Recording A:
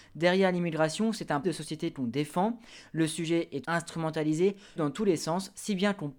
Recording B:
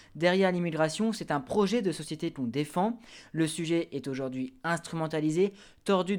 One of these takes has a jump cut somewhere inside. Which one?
A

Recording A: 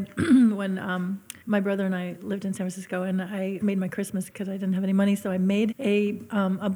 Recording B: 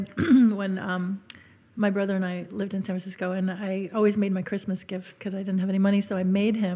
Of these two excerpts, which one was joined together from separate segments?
A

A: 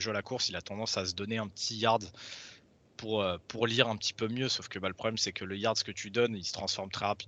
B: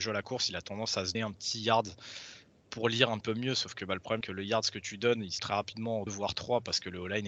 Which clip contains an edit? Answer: B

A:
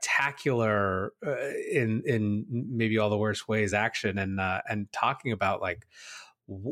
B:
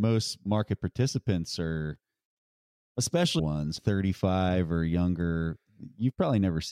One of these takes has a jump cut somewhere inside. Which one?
B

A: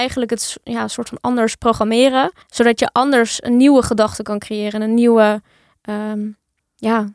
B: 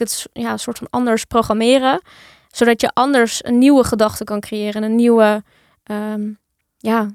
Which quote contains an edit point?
A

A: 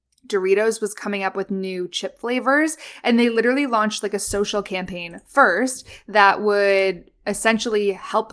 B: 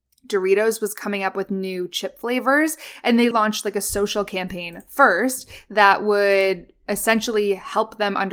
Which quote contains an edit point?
B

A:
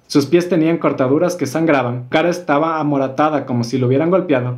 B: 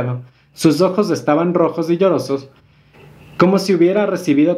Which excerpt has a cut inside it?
A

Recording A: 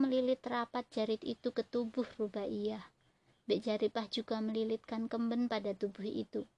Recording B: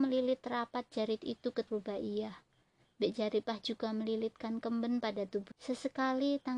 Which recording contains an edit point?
B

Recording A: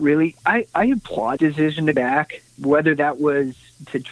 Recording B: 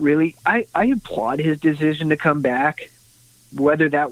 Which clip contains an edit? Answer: A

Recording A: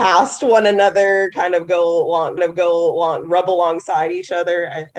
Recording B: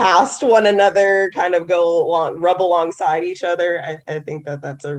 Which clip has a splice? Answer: A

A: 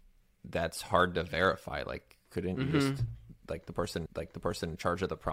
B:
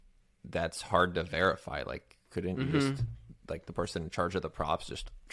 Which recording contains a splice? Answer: A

